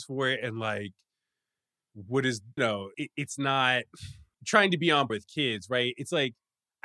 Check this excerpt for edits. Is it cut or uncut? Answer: cut